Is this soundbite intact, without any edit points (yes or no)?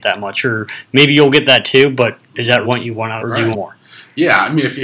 no